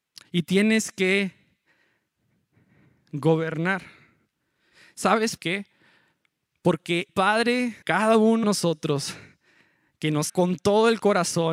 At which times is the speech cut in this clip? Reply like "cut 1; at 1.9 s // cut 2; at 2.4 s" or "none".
cut 1; at 5.4 s // cut 2; at 7.1 s // cut 3; at 7.8 s // cut 4; at 8.4 s // cut 5; at 10.3 s